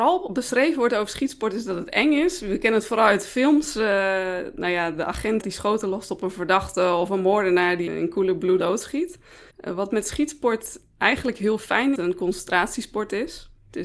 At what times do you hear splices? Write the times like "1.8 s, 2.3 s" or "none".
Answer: 5.4 s, 7.9 s, 8.6 s, 9.5 s, 12.0 s